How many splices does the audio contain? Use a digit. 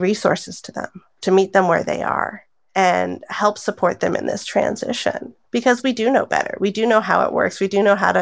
1